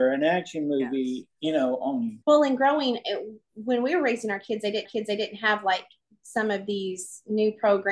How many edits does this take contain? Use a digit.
2